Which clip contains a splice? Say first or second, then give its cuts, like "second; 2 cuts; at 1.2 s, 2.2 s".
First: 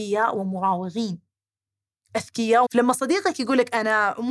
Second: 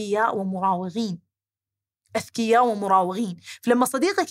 first; 1 cut; at 2.7 s